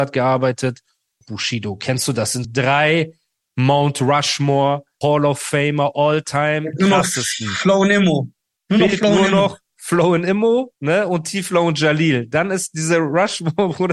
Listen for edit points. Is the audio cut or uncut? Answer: cut